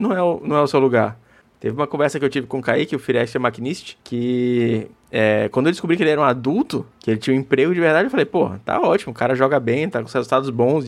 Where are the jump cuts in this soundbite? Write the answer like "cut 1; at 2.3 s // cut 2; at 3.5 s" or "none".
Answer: cut 1; at 4.0 s // cut 2; at 6.9 s